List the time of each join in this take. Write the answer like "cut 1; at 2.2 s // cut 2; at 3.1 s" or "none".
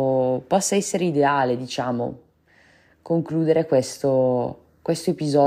none

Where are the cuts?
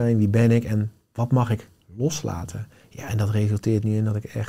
cut 1; at 2.8 s

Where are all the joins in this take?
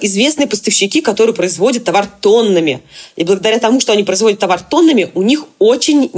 none

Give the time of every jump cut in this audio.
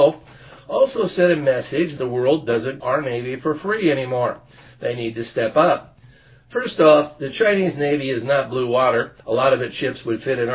cut 1; at 2.0 s // cut 2; at 2.8 s // cut 3; at 9.2 s

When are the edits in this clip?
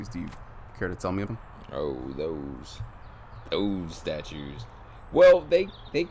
cut 1; at 1.3 s

